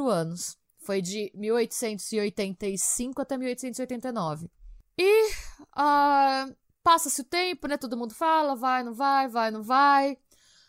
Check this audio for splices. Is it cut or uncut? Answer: uncut